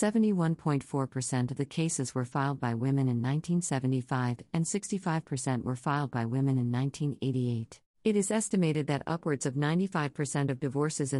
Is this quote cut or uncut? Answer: cut